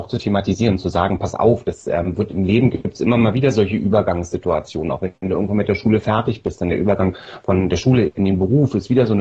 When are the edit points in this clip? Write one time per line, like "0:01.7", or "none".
none